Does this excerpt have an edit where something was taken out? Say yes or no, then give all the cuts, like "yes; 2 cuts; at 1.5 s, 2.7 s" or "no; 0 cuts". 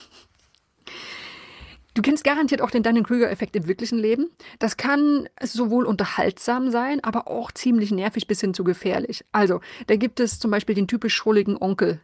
no; 0 cuts